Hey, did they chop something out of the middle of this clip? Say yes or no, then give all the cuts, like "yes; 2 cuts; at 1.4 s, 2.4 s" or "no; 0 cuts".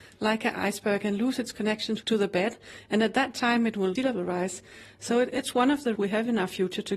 yes; 3 cuts; at 4.0 s, 5.3 s, 6.0 s